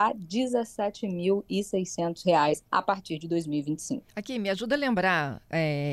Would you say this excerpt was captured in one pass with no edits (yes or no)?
no